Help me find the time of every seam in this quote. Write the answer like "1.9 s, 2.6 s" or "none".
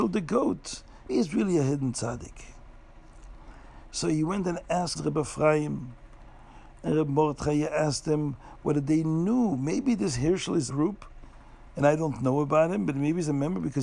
1.1 s, 4.9 s, 10.7 s